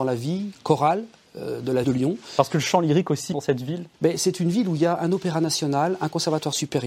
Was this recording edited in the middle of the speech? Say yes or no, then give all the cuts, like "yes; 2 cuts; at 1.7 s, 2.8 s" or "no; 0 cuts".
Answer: yes; 3 cuts; at 1.8 s, 3.3 s, 3.9 s